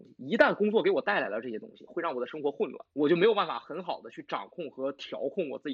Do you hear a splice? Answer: yes; 1 cut; at 2.9 s

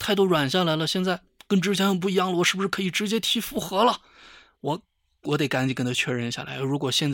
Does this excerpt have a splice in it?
no; 0 cuts

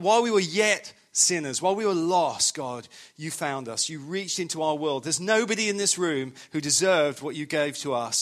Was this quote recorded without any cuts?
yes; 0 cuts

